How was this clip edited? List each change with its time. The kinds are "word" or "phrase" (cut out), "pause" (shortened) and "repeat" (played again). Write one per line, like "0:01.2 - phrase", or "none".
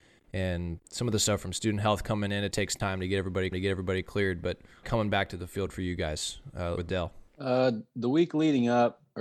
0:02.5 - word
0:03.5 - repeat
0:04.8 - phrase
0:06.8 - word
0:07.3 - pause